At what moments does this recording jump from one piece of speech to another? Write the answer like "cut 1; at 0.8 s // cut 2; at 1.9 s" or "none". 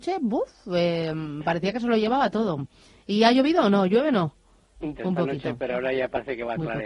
cut 1; at 5.0 s